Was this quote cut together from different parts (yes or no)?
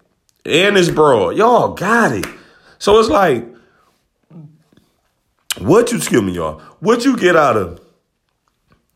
no